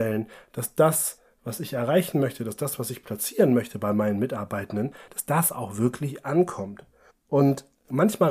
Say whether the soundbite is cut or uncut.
cut